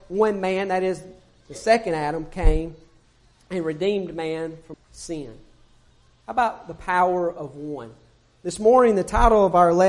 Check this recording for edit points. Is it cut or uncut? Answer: cut